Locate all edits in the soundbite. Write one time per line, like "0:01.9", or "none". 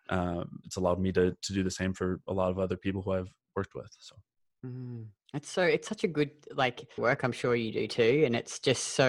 0:07.0